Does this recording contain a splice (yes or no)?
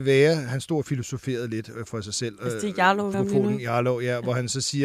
yes